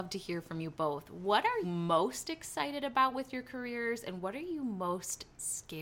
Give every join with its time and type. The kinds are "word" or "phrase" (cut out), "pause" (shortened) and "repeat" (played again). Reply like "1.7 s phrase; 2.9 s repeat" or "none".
1.6 s word